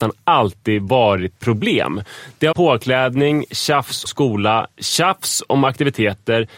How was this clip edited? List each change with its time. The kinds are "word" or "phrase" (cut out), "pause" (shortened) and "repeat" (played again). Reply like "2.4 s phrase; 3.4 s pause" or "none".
1.4 s word; 2.5 s phrase; 4.1 s word